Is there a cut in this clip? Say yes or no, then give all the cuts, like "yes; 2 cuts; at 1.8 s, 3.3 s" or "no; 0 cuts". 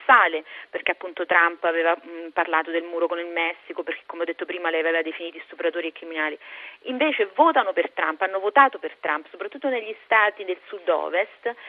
no; 0 cuts